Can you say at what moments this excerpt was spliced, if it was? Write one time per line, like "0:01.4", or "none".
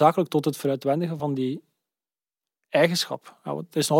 none

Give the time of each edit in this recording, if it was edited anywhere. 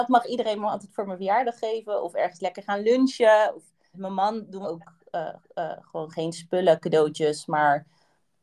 0:03.9
0:04.6
0:05.4

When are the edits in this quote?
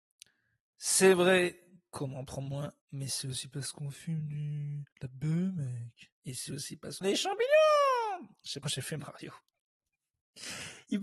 0:02.8
0:04.9
0:06.2
0:07.0
0:08.6

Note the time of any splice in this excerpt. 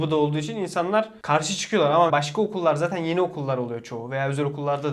0:02.1

